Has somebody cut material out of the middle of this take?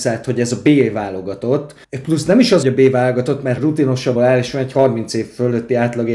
yes; 4 cuts; at 1.8 s, 2.6 s, 3.6 s, 4.2 s

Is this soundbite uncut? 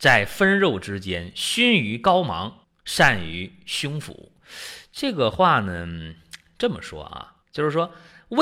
no; 2 cuts; at 2.6 s, 7.4 s

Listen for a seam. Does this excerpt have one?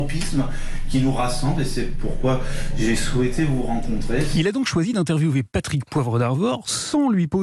no; 0 cuts

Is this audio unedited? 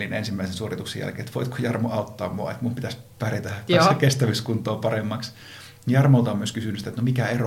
yes; 0 cuts

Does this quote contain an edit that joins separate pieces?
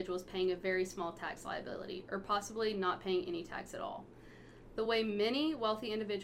no; 0 cuts

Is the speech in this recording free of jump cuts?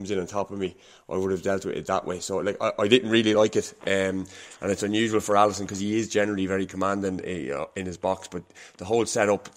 yes; 0 cuts

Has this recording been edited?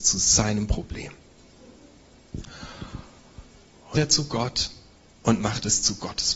yes; 1 cut; at 3.9 s

